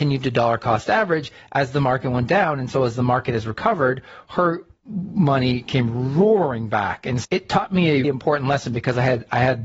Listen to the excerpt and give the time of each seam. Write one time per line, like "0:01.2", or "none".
0:07.2
0:08.0